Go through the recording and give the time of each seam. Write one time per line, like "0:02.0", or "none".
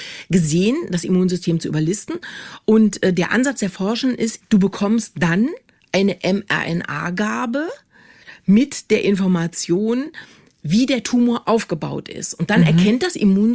0:04.4